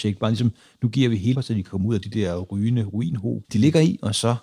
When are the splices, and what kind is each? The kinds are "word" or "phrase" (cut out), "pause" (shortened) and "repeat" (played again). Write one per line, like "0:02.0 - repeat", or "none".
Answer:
0:01.3 - word
0:03.4 - word